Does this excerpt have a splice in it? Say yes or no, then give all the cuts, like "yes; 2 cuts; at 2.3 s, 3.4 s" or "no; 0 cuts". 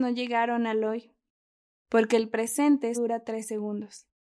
yes; 1 cut; at 2.9 s